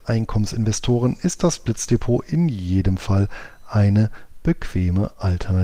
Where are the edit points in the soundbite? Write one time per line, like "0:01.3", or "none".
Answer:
none